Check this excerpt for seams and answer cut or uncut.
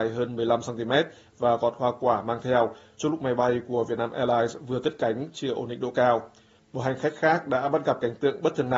uncut